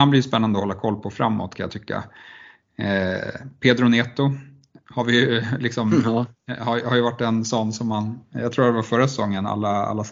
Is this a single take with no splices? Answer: yes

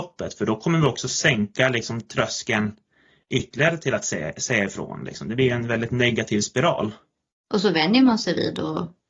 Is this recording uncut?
yes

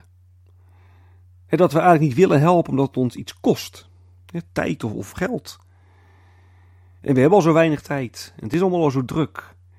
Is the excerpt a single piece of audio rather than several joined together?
yes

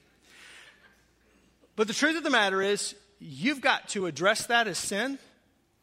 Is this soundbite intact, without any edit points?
yes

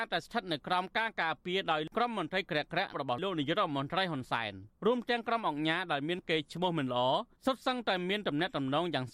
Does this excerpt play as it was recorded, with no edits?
no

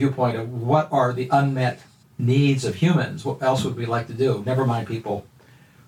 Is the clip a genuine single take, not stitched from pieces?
no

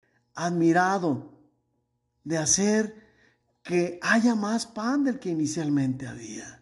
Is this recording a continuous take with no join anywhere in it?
yes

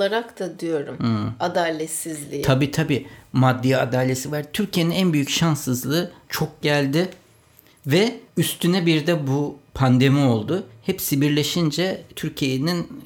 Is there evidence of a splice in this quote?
yes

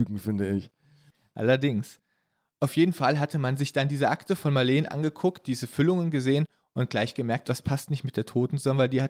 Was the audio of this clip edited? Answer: no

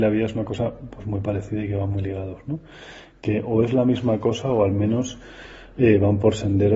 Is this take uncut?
yes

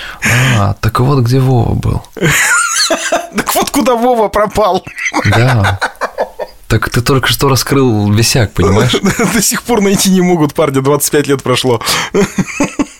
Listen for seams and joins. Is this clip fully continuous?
yes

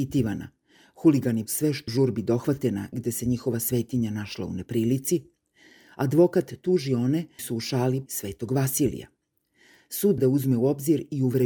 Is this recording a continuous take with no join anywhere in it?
no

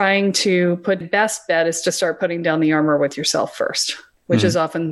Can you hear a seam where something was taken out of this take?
yes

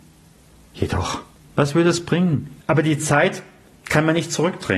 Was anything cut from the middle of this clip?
yes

